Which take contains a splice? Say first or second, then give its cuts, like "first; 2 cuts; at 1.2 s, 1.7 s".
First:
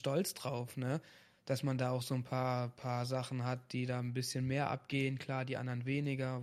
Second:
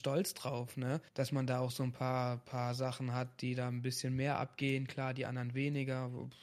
second; 1 cut; at 1.1 s